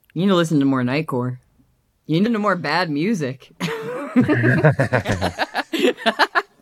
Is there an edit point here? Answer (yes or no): yes